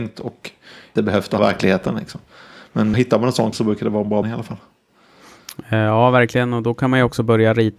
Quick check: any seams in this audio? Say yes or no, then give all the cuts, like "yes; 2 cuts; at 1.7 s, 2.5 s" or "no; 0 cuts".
yes; 5 cuts; at 1.0 s, 1.4 s, 2.9 s, 3.5 s, 4.2 s